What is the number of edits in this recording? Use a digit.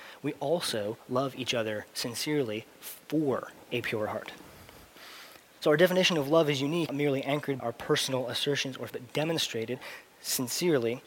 3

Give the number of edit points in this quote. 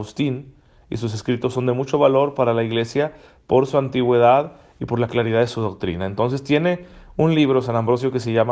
0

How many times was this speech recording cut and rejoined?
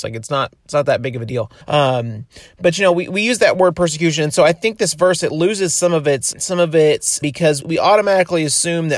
4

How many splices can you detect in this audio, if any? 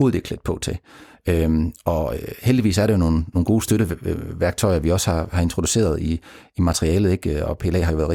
0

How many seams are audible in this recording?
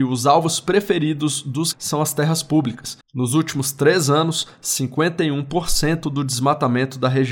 2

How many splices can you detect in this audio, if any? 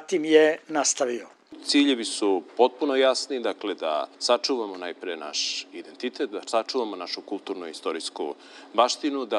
1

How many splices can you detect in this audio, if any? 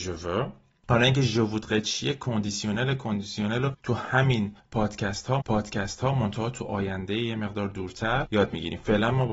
1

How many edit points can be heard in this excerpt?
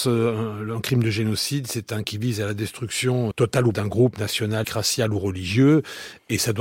4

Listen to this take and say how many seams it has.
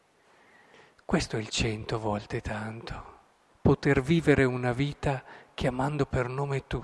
1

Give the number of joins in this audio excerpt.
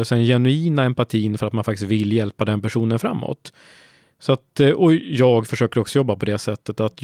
0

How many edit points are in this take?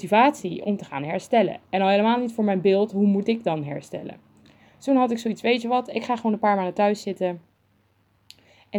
1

